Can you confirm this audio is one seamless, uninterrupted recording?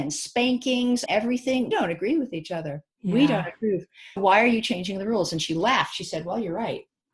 no; 4 cuts; at 1.1 s, 1.7 s, 2.9 s, 4.2 s

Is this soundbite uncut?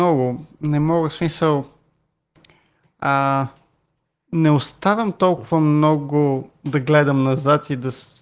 yes; 0 cuts

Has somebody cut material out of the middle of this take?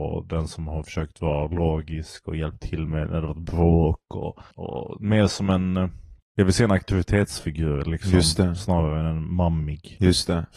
yes; 2 cuts; at 4.5 s, 6.2 s

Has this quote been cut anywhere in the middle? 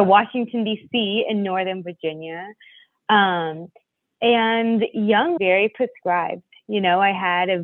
yes; 1 cut; at 5.4 s

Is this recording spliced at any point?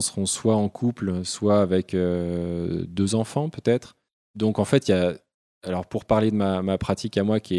no; 0 cuts

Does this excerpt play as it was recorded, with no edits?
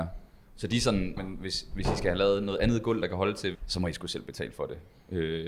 no; 2 cuts; at 1.2 s, 3.5 s

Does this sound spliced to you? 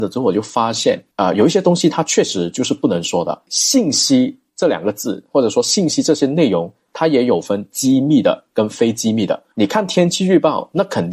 yes; 2 cuts; at 4.5 s, 9.5 s

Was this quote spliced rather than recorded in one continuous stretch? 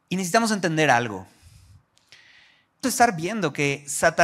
yes; 1 cut; at 2.8 s

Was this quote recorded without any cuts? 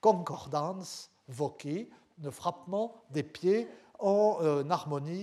yes; 0 cuts

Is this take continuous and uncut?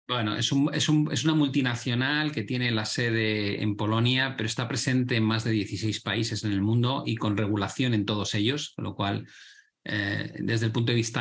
yes; 0 cuts

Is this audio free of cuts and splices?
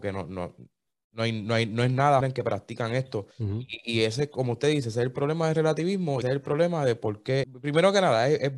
no; 4 cuts; at 2.2 s, 3.3 s, 6.2 s, 7.4 s

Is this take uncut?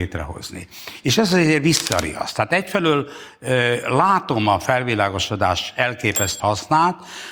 no; 1 cut; at 6.4 s

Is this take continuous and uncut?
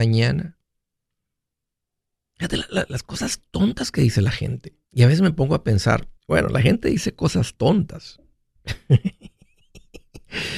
no; 2 cuts; at 4.8 s, 6.2 s

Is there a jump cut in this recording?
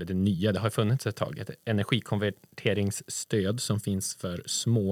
no; 0 cuts

